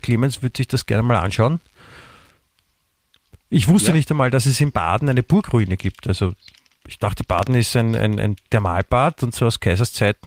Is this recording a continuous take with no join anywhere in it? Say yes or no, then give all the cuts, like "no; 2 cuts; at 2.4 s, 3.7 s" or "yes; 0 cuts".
yes; 0 cuts